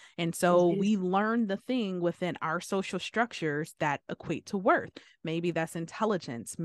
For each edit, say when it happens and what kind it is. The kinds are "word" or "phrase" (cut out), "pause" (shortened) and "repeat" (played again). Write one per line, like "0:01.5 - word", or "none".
none